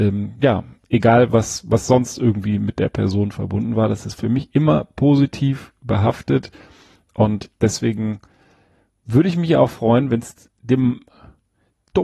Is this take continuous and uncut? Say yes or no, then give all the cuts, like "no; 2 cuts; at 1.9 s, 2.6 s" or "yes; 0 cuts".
no; 1 cut; at 7.5 s